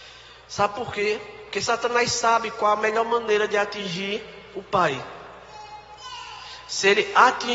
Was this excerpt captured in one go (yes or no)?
yes